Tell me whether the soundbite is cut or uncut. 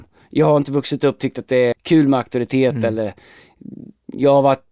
cut